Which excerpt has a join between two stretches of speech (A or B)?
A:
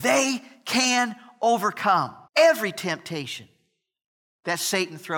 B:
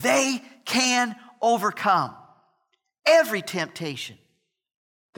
A